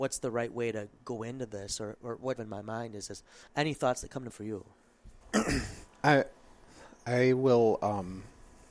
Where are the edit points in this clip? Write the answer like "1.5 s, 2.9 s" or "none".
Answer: 2.4 s, 3.5 s, 4.3 s, 5.2 s

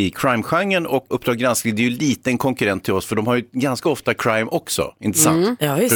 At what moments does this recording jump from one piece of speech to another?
1.1 s

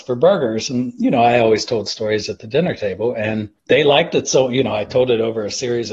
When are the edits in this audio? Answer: 3.6 s

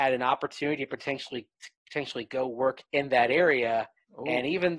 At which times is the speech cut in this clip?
1.8 s, 2.9 s

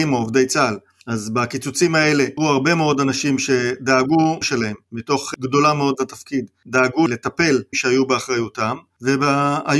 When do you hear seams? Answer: 2.4 s, 4.4 s, 5.4 s, 7.7 s

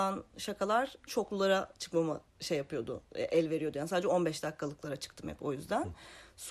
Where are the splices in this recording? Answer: 1.1 s, 2.3 s

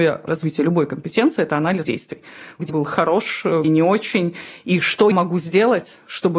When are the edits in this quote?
1.8 s, 2.7 s, 3.6 s, 5.1 s

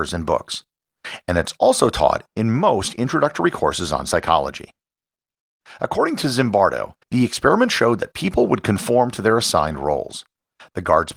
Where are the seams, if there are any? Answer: 7.0 s

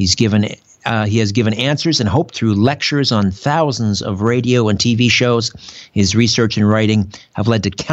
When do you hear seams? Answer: 2.3 s

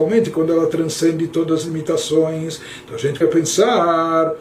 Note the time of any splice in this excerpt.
3.2 s

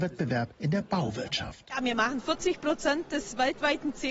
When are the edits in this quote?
none

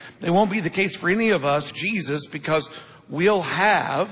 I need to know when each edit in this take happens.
1.7 s

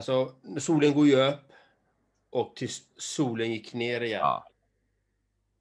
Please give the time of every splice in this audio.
none

